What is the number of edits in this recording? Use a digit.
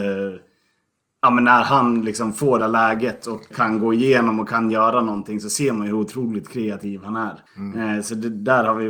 3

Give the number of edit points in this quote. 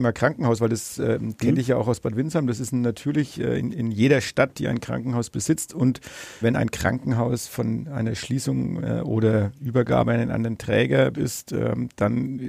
2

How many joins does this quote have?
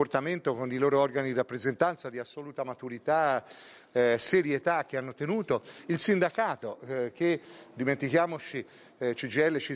0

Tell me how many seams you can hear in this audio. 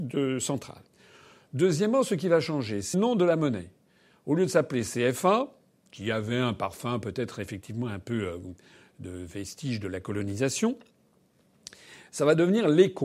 1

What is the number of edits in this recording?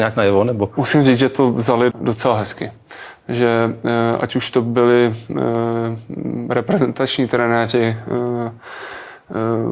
1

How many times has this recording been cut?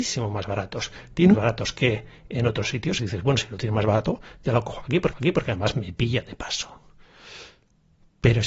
3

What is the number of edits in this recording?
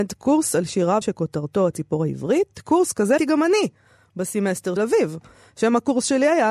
3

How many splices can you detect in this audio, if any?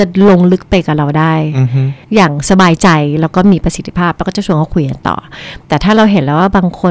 1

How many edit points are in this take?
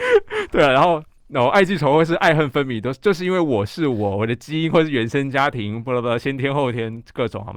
0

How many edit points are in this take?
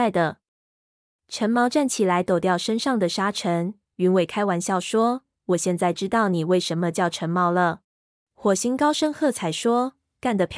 1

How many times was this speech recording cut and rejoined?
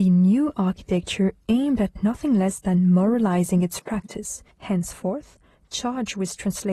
1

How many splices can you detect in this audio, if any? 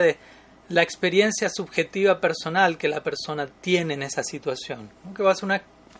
1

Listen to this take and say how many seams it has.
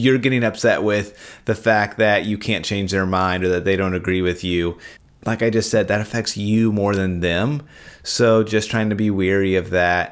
1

